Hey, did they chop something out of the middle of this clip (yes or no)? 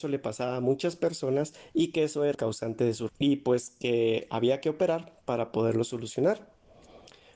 yes